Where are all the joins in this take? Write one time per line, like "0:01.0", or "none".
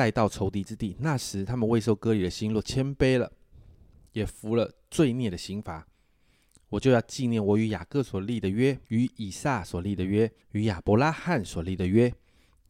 0:08.8
0:10.4